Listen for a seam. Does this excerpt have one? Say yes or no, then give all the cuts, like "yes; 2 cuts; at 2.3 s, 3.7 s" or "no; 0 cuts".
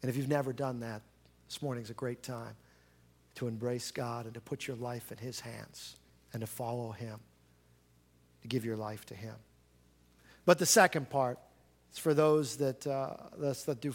yes; 1 cut; at 6.1 s